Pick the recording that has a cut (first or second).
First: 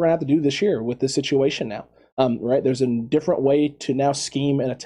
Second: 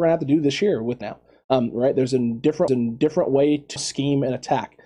second